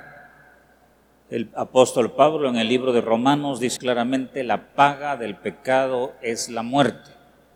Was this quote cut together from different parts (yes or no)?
yes